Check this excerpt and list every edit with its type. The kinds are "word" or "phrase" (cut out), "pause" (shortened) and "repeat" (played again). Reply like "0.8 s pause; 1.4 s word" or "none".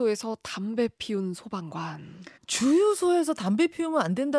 2.4 s pause